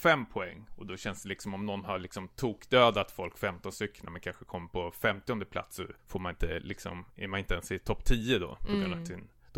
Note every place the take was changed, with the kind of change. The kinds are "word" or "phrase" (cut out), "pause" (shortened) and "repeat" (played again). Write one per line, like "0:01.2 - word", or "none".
0:06.0 - pause